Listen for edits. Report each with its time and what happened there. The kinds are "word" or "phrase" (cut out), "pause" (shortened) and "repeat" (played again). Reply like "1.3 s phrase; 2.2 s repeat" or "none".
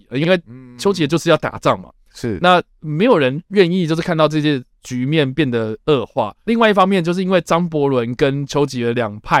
3.4 s pause